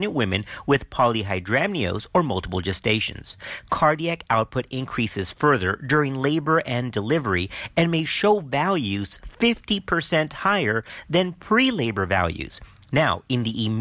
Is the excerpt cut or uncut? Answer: uncut